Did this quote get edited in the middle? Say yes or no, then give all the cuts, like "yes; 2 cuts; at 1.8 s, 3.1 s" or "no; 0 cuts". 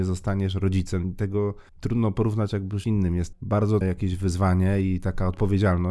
yes; 4 cuts; at 1.7 s, 2.8 s, 3.3 s, 3.8 s